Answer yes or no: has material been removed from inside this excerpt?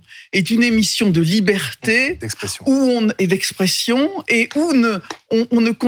no